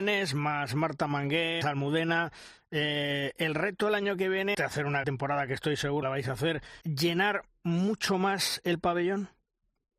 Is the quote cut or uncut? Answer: cut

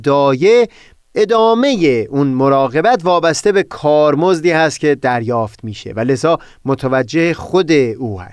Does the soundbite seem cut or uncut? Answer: uncut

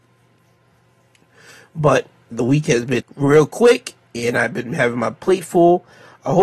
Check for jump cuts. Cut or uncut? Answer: cut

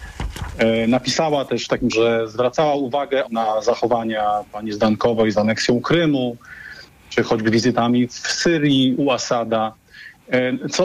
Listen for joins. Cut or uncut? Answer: cut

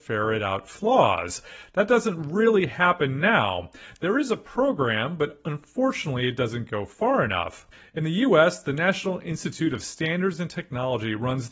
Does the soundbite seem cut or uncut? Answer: uncut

